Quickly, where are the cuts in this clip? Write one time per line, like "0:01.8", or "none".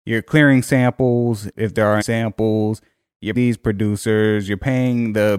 0:01.5
0:02.0
0:03.4